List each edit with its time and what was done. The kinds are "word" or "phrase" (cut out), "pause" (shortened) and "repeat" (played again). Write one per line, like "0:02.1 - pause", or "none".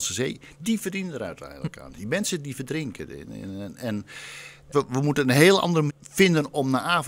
0:04.7 - word
0:05.9 - word